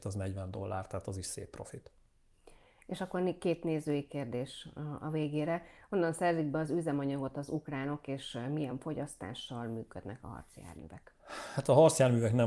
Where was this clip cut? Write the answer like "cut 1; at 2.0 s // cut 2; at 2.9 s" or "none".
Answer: none